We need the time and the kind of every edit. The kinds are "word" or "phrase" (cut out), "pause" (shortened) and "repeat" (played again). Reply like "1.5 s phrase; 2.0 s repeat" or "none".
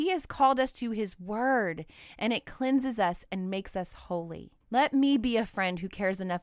4.6 s pause